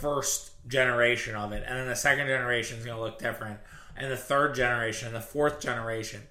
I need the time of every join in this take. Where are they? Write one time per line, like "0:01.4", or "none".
none